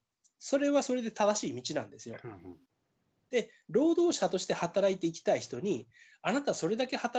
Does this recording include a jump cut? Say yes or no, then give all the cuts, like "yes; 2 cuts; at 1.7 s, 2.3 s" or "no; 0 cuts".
no; 0 cuts